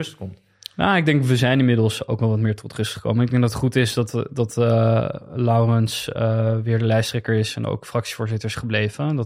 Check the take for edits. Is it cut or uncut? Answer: uncut